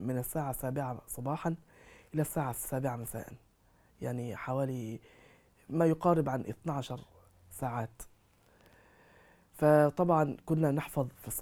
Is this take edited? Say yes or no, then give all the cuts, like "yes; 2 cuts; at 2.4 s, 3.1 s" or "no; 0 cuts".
no; 0 cuts